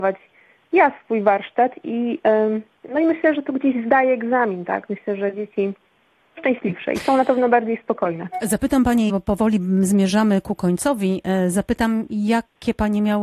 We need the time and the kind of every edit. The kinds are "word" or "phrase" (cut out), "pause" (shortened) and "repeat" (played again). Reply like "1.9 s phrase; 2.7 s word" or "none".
3.3 s word; 6.4 s word; 9.1 s word